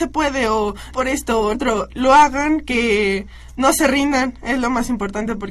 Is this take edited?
yes; 2 cuts; at 0.9 s, 1.5 s

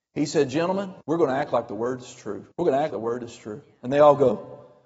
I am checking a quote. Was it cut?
yes; 3 cuts; at 1.0 s, 2.5 s, 2.9 s

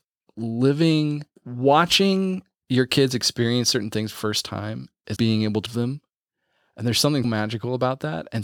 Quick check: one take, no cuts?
no; 5 cuts; at 1.4 s, 4.1 s, 5.2 s, 5.7 s, 7.2 s

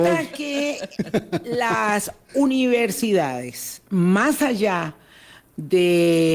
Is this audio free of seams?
yes; 0 cuts

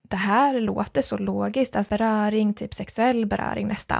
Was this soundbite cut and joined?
yes; 1 cut; at 1.9 s

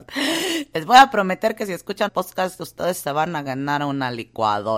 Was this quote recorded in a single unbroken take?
no; 1 cut; at 2.1 s

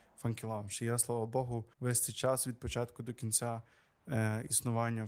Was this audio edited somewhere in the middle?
yes; 1 cut; at 1.7 s

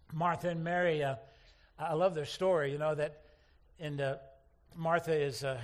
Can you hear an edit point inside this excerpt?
no; 0 cuts

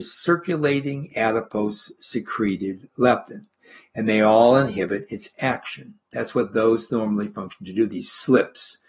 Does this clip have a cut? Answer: no; 0 cuts

